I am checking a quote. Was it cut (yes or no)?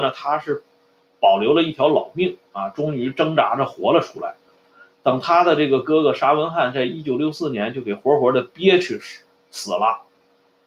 yes